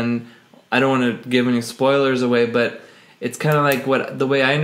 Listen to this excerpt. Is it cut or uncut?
uncut